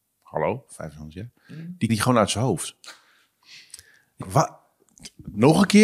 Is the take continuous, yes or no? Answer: no